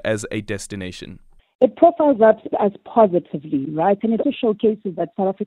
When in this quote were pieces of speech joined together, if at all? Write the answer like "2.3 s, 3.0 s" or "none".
1.4 s, 2.5 s, 4.2 s